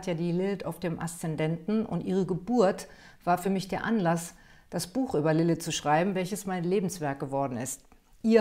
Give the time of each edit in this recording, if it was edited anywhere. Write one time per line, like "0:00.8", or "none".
none